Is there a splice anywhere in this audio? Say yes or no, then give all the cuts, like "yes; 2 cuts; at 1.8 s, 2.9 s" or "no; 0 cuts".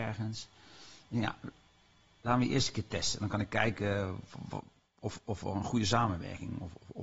no; 0 cuts